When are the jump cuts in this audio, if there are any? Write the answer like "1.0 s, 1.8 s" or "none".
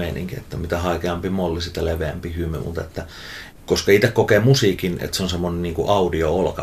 none